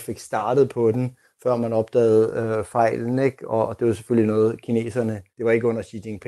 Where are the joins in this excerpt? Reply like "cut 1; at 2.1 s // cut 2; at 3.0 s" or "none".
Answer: cut 1; at 5.3 s